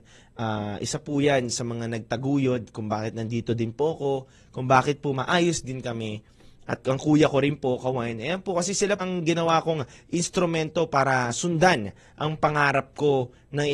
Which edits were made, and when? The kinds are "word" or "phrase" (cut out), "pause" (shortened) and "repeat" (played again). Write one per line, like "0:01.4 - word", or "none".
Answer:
0:09.0 - phrase